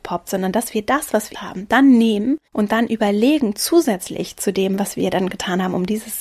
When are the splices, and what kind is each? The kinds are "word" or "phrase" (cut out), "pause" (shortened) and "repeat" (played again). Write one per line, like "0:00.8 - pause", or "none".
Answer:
0:01.3 - word
0:02.5 - pause